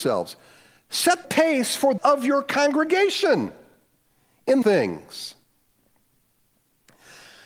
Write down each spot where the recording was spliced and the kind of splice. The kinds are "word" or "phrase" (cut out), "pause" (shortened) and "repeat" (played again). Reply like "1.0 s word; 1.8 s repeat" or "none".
1.2 s word; 2.0 s word; 4.6 s word